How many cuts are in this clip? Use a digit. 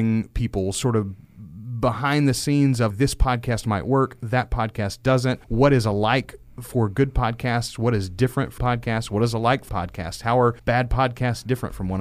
5